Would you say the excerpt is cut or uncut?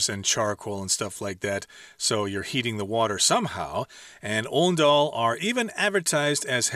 uncut